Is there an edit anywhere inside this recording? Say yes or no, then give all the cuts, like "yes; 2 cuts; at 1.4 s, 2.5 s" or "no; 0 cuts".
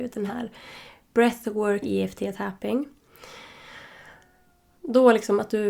yes; 1 cut; at 1.8 s